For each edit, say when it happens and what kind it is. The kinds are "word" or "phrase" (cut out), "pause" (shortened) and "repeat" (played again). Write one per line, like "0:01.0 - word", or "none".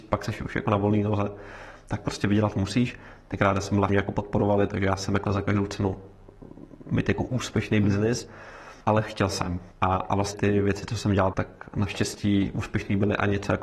0:03.9 - phrase
0:05.3 - word
0:08.8 - pause
0:09.7 - pause
0:10.3 - word
0:11.3 - word